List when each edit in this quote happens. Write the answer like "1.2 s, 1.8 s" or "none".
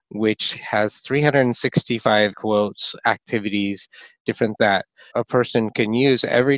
2.3 s, 4.6 s, 5.1 s